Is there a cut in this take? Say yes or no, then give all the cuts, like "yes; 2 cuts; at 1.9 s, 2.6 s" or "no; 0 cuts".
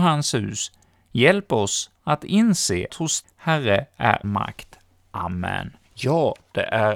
yes; 5 cuts; at 2.0 s, 2.9 s, 3.2 s, 4.2 s, 5.8 s